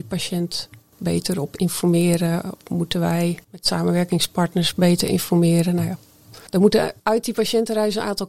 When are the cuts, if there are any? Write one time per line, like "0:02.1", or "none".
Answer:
0:03.4
0:06.5
0:07.0